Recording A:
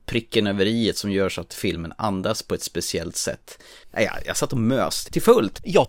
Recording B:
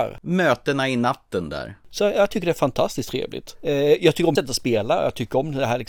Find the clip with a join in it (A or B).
B